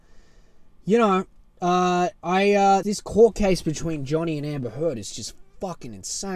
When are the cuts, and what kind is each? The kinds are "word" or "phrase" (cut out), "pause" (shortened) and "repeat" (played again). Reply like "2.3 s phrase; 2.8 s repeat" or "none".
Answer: 1.4 s pause; 2.8 s word